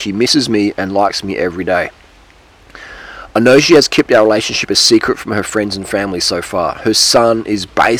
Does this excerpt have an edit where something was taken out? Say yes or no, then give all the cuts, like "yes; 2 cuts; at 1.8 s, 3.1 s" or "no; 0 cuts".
no; 0 cuts